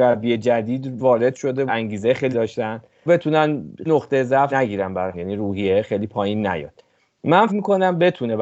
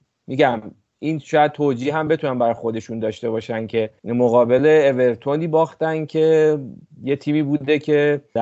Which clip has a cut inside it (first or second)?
first